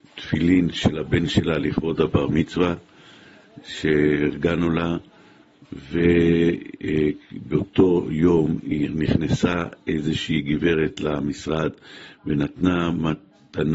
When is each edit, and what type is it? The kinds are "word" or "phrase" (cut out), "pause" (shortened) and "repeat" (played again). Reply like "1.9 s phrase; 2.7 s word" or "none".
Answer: none